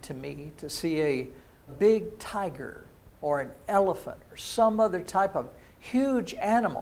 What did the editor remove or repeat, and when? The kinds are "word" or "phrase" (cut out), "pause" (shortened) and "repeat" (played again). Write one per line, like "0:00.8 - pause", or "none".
0:01.7 - word